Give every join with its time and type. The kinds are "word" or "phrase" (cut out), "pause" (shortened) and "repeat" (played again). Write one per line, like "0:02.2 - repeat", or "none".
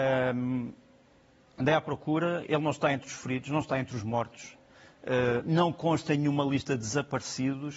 none